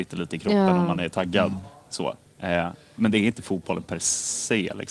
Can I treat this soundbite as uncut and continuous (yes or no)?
yes